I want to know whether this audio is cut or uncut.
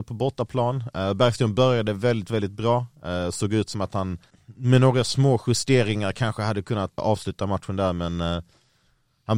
cut